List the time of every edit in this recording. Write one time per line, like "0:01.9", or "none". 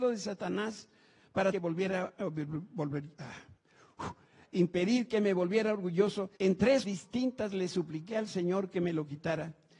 0:01.5
0:02.1
0:06.4
0:06.8